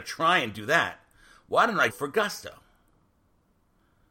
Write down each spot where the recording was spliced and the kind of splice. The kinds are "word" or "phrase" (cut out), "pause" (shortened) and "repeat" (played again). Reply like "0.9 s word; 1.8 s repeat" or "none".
1.9 s word